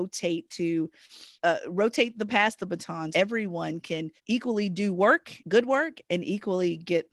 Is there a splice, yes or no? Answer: yes